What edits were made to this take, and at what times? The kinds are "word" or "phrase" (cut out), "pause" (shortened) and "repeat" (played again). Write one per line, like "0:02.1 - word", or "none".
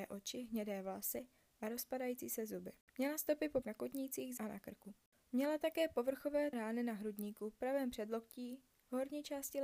0:03.6 - word
0:04.4 - word
0:06.5 - word